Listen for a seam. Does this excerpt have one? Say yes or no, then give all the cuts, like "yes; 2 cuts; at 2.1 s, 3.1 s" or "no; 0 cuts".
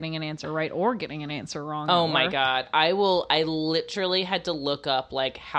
no; 0 cuts